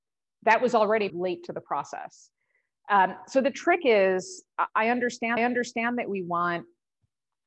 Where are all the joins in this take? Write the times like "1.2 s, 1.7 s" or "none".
1.1 s, 5.4 s